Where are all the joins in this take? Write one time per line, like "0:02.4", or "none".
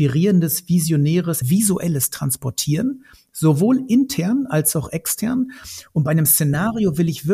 0:01.4